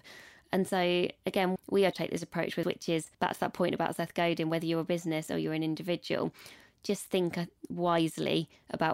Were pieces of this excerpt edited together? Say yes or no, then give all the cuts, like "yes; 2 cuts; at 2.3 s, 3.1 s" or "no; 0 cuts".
yes; 4 cuts; at 1.6 s, 1.9 s, 2.6 s, 3.1 s